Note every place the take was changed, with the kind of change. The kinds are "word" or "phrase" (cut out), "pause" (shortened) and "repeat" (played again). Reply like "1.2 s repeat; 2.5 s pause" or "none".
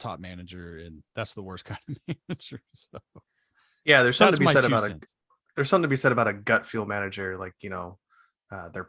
1.1 s pause